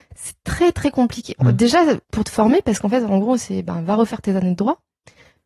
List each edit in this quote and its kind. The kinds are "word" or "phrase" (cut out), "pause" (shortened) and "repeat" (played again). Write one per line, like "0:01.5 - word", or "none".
0:02.0 - pause